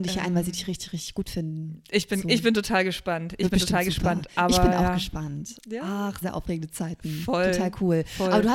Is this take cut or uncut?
cut